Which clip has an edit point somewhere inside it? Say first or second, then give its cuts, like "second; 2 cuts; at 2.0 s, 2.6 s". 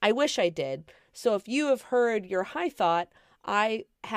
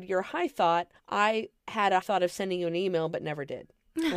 second; 2 cuts; at 1.0 s, 2.0 s